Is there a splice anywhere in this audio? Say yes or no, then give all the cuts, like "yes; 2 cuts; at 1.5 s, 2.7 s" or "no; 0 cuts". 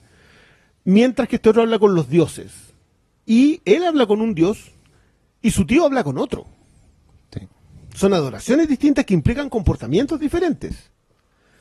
no; 0 cuts